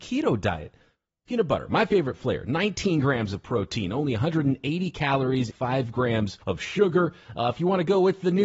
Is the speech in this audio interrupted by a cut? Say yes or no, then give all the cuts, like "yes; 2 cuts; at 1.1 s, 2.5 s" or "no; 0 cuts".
yes; 2 cuts; at 5.5 s, 6.4 s